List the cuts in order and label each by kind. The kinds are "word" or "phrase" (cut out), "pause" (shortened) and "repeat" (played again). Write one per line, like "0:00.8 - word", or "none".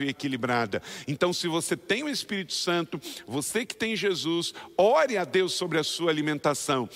none